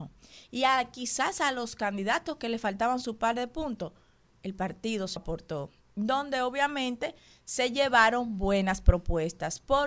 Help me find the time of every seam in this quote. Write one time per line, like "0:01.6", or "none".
0:05.2